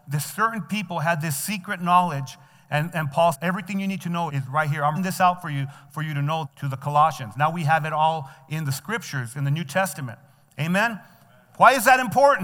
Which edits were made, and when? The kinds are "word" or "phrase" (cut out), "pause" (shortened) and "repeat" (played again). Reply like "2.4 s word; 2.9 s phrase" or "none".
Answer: 3.3 s word; 4.3 s word; 5.0 s word; 6.4 s word